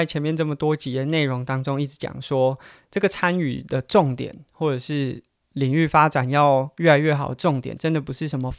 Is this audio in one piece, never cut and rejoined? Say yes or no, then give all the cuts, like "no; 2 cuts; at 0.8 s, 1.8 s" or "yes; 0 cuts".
yes; 0 cuts